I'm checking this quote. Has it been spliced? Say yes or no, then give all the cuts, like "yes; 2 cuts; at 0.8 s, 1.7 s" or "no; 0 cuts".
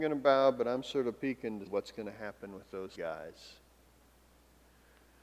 yes; 2 cuts; at 1.7 s, 2.9 s